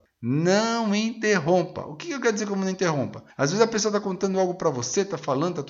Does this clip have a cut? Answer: yes; 1 cut; at 3.3 s

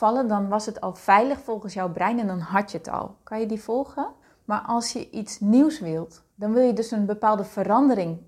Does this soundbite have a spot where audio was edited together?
yes; 2 cuts; at 4.2 s, 6.3 s

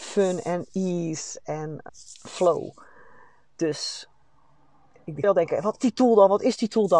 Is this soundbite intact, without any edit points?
no; 3 cuts; at 1.9 s, 5.2 s, 5.8 s

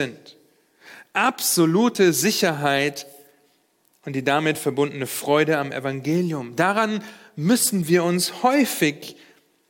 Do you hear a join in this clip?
no; 0 cuts

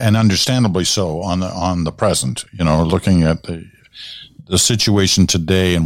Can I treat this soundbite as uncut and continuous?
yes; 0 cuts

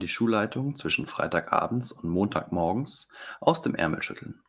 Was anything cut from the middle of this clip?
no; 0 cuts

